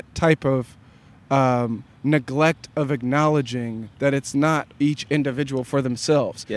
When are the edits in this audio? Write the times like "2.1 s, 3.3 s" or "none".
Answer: 3.9 s, 4.7 s